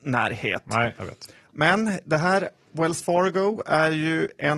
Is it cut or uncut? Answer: uncut